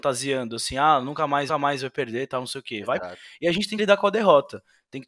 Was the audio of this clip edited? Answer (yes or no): yes